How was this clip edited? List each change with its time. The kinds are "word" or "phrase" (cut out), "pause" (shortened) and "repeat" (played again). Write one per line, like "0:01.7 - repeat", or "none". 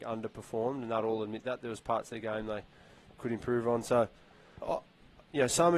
0:04.6 - word